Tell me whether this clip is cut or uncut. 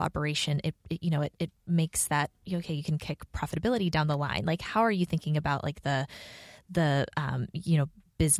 cut